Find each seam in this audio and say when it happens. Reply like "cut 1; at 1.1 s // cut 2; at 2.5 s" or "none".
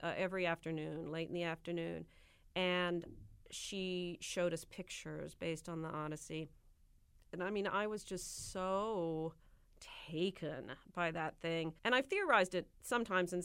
cut 1; at 11.8 s